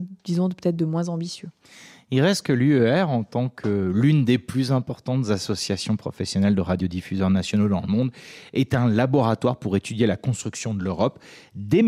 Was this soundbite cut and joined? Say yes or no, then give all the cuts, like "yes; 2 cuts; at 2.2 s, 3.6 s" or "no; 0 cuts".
no; 0 cuts